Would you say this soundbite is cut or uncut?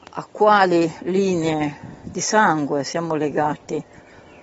uncut